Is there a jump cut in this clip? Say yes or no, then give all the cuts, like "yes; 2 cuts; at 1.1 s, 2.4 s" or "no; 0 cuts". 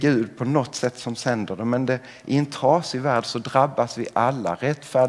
no; 0 cuts